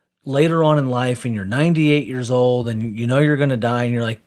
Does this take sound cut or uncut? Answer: uncut